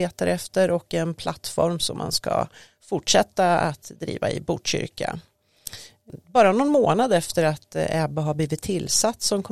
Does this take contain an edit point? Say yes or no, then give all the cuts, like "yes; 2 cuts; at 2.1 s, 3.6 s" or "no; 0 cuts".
no; 0 cuts